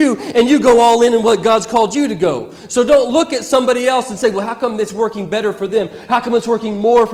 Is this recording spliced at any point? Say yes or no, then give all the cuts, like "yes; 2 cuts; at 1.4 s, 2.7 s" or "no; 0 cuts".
no; 0 cuts